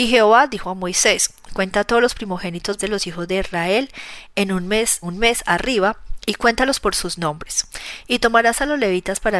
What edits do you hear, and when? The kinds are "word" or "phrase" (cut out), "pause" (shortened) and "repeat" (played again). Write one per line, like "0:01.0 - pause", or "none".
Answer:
0:02.8 - word
0:05.0 - word